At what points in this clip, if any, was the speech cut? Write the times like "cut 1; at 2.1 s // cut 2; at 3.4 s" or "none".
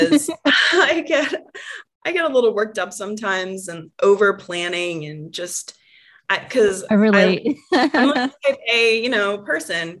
none